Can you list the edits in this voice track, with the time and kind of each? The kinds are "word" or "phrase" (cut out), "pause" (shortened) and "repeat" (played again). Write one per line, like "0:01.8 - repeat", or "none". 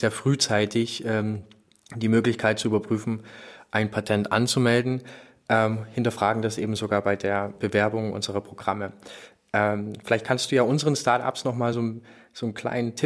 none